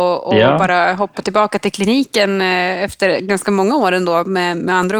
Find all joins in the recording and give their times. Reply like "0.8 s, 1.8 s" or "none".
none